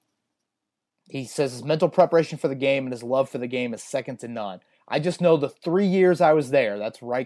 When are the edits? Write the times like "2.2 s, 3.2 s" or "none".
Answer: none